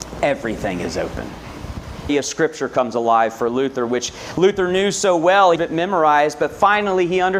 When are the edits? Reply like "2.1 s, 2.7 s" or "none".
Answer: 2.1 s, 5.6 s